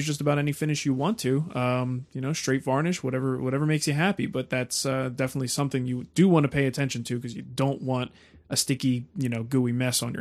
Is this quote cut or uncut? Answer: uncut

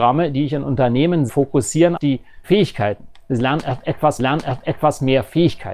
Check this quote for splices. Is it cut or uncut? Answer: cut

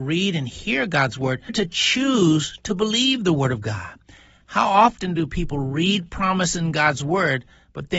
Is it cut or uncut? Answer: cut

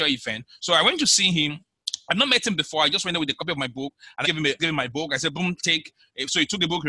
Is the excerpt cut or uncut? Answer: cut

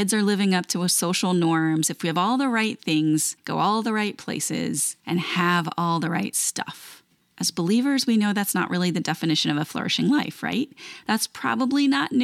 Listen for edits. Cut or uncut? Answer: uncut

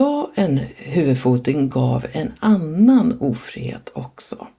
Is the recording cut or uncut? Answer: uncut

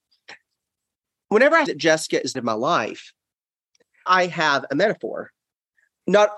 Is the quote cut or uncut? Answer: cut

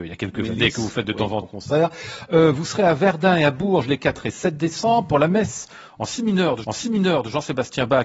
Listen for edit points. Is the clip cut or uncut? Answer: cut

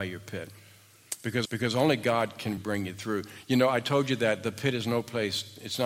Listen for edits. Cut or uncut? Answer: cut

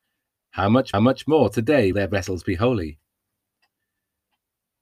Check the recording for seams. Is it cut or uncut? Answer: cut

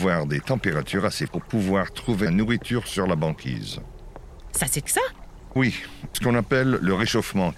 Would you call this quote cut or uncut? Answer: cut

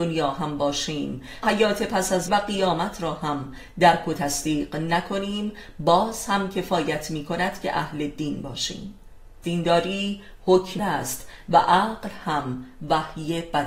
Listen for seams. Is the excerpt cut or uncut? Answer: cut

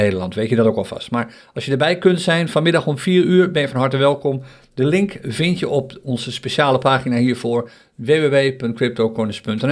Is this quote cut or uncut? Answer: uncut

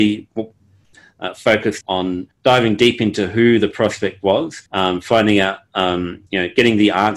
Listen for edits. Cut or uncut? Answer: cut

